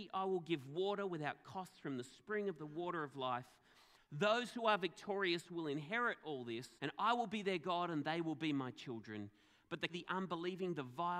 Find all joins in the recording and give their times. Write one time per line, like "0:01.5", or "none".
0:06.8
0:09.9